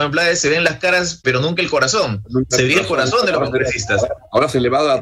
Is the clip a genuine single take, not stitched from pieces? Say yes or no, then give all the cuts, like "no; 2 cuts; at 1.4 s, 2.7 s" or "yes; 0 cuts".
no; 1 cut; at 1.2 s